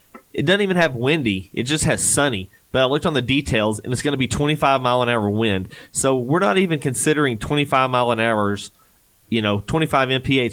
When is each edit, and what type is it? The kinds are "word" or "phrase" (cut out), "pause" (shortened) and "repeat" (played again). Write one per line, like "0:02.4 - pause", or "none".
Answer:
none